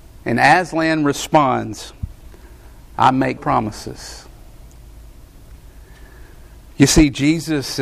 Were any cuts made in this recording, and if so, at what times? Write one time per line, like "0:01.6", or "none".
0:03.4